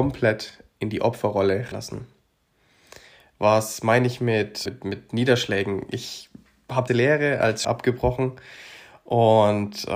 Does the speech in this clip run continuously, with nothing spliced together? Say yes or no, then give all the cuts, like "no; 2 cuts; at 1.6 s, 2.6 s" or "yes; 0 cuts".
no; 4 cuts; at 1.7 s, 4.7 s, 6.9 s, 7.6 s